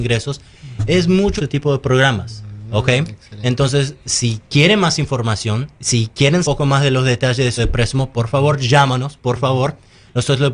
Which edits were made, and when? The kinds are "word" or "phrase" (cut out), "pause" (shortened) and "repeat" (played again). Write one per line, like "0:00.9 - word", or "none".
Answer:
0:01.4 - phrase
0:05.7 - pause
0:06.4 - phrase
0:07.6 - word